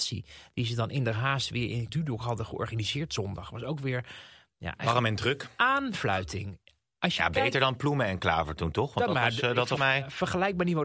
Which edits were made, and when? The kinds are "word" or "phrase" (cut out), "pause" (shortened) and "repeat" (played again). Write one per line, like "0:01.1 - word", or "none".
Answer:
0:01.9 - word
0:09.8 - word